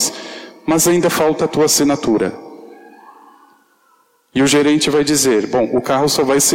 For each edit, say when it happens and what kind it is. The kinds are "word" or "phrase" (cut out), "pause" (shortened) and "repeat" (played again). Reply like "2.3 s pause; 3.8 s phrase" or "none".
none